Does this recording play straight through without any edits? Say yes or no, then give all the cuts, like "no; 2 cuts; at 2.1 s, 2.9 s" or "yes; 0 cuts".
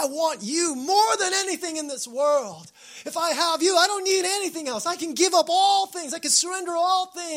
yes; 0 cuts